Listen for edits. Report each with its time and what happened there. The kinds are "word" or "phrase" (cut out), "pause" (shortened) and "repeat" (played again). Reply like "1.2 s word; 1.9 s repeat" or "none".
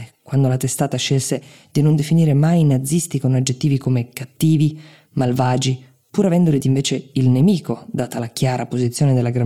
6.6 s word

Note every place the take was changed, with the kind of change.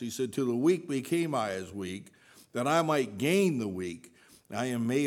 none

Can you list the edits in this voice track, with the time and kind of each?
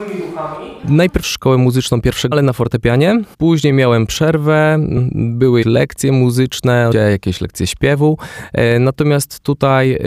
1.2 s word; 2.3 s word; 3.3 s pause; 5.6 s word; 6.9 s word

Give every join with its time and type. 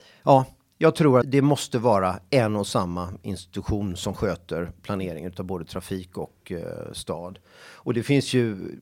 1.2 s word

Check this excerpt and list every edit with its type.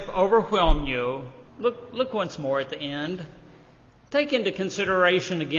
1.5 s pause

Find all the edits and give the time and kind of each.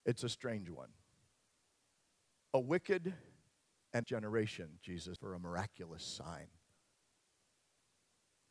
4.0 s word; 5.2 s phrase

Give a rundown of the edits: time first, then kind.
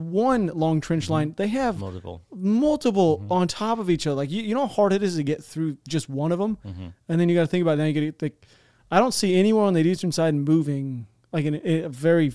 none

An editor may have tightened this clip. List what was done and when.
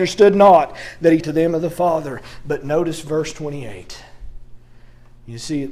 1.2 s word

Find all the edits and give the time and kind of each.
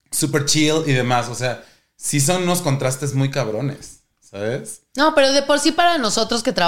none

